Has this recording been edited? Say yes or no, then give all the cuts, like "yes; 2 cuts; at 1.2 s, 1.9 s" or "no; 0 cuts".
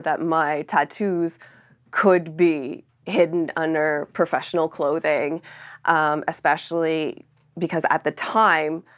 no; 0 cuts